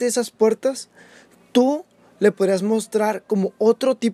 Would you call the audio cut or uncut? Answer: uncut